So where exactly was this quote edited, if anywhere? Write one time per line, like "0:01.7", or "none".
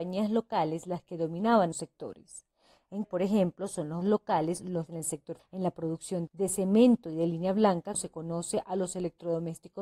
0:01.7
0:03.0
0:04.0
0:04.9
0:05.4
0:06.3
0:07.9